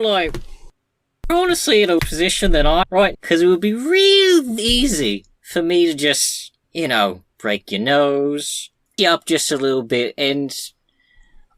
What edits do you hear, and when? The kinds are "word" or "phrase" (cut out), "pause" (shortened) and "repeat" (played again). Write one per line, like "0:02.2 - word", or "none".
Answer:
0:01.3 - word
0:02.0 - word
0:02.8 - word
0:03.1 - word
0:04.6 - word
0:05.4 - pause
0:06.6 - pause
0:07.3 - pause
0:09.0 - word